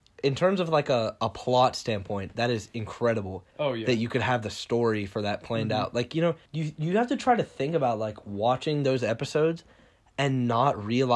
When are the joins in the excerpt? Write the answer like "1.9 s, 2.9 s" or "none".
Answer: 3.5 s, 6.5 s